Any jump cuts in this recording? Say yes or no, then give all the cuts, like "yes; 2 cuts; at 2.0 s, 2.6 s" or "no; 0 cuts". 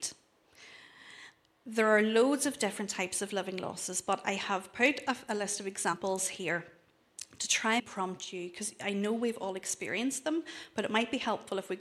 yes; 1 cut; at 7.8 s